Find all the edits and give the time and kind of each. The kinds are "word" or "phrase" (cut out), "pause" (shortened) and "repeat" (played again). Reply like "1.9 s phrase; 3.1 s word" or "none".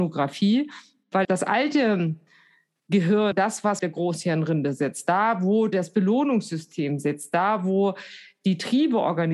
1.2 s word; 3.3 s word; 3.8 s word